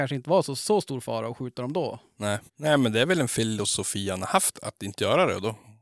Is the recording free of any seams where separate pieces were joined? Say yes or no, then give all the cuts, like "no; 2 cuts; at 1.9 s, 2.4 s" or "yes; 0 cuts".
no; 2 cuts; at 2.5 s, 4.5 s